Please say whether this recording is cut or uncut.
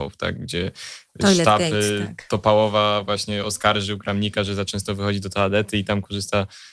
uncut